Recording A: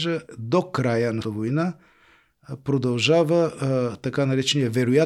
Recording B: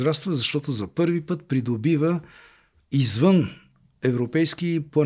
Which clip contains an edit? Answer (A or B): A